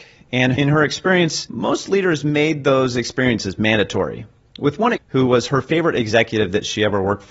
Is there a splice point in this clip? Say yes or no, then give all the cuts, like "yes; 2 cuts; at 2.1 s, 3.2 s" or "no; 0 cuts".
yes; 1 cut; at 5.0 s